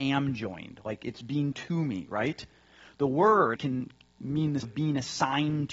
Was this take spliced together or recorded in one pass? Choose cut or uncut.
cut